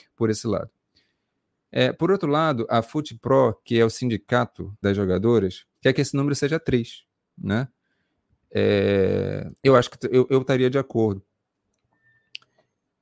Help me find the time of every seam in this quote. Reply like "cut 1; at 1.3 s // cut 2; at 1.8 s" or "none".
cut 1; at 4.8 s // cut 2; at 5.7 s // cut 3; at 9.6 s